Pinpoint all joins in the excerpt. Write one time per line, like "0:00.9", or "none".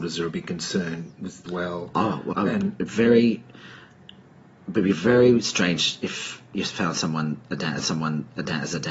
0:01.5
0:02.3
0:04.3
0:07.8